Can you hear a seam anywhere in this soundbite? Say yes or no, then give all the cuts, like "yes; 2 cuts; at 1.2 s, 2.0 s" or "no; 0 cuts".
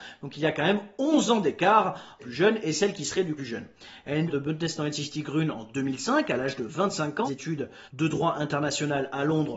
yes; 5 cuts; at 2.2 s, 3.4 s, 4.3 s, 7.3 s, 7.9 s